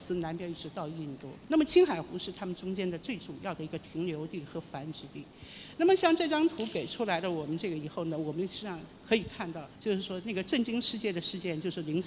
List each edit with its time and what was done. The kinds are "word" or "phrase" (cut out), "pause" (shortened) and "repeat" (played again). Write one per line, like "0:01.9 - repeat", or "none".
0:01.4 - pause
0:09.7 - pause